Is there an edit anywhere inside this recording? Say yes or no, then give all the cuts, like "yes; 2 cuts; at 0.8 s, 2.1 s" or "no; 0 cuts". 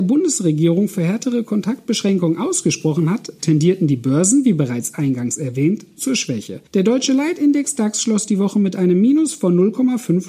yes; 1 cut; at 6.7 s